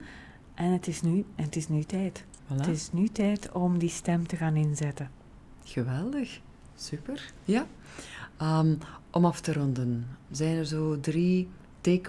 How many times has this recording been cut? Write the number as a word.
two